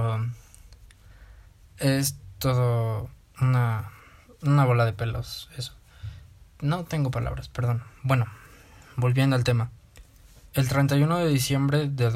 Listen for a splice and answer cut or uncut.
uncut